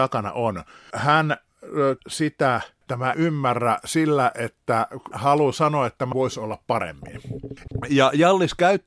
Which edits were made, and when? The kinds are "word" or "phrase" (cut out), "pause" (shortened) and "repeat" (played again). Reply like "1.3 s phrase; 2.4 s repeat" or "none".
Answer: 0.9 s word; 2.0 s word; 3.1 s word; 5.1 s word; 6.1 s word